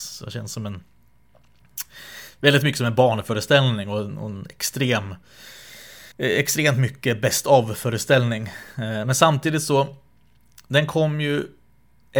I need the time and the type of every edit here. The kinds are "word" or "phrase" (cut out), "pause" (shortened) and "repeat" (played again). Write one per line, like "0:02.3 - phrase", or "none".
0:06.1 - pause